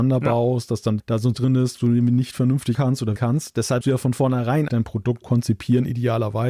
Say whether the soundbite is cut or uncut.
cut